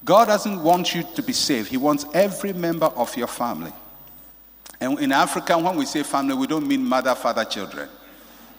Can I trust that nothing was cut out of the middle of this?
no; 1 cut; at 1.1 s

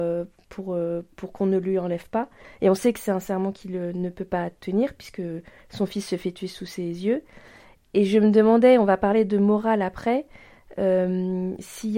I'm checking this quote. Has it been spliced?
no; 0 cuts

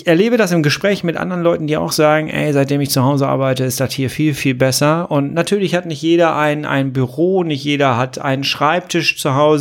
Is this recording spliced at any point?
no; 0 cuts

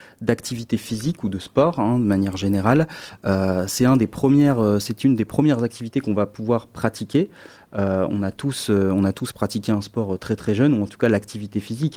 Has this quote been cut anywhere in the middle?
no; 0 cuts

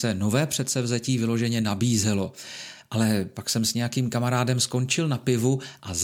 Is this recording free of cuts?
yes; 0 cuts

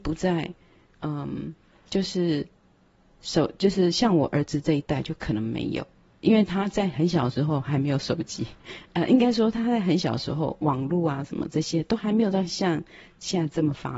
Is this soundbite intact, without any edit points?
yes; 0 cuts

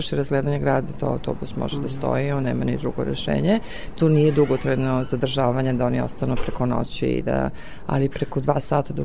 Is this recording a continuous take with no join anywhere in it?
yes; 0 cuts

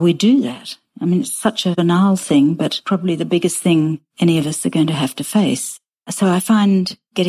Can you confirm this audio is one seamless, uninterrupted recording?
yes; 0 cuts

